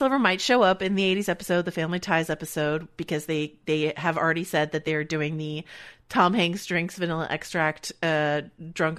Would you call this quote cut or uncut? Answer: uncut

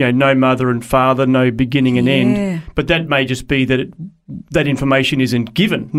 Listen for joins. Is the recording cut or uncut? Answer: uncut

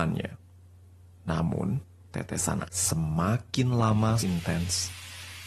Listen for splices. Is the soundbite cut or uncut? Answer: cut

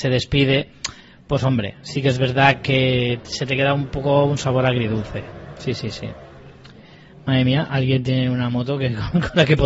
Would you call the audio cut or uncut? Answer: uncut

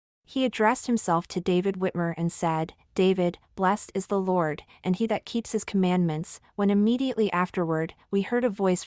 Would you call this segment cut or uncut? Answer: uncut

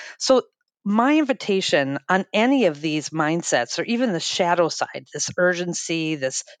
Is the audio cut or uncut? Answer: uncut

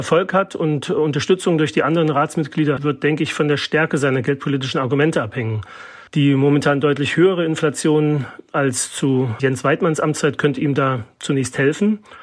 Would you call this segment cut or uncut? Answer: cut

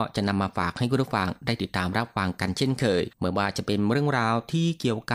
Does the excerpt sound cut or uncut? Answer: cut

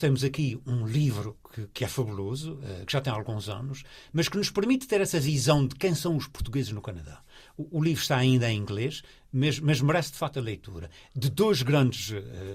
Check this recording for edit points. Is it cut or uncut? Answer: uncut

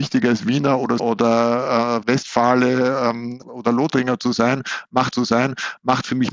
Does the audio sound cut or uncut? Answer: cut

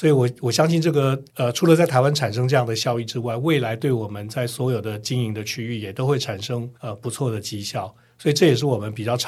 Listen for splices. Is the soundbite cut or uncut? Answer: cut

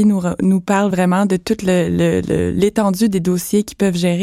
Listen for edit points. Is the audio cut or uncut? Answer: uncut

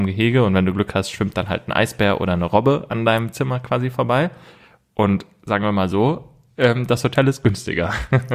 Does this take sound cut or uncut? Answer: uncut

